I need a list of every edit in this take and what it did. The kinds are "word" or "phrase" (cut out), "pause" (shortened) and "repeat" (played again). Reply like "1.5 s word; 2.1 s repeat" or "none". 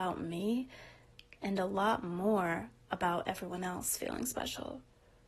none